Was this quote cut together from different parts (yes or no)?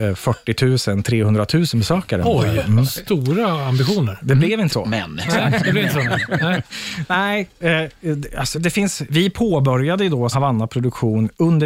yes